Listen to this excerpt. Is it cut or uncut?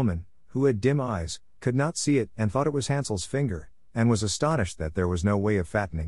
uncut